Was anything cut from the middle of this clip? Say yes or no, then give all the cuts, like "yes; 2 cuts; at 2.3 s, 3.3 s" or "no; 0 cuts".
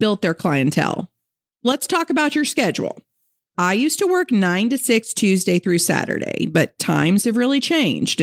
no; 0 cuts